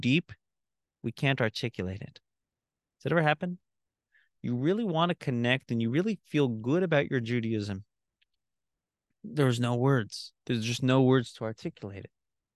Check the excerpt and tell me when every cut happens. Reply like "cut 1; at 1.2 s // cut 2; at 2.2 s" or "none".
cut 1; at 10.4 s